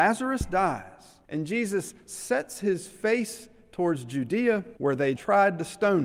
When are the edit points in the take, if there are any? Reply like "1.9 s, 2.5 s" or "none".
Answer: 1.2 s, 4.8 s, 5.2 s